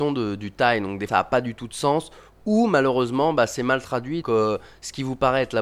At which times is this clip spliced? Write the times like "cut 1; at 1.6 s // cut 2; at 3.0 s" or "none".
cut 1; at 1.1 s // cut 2; at 4.2 s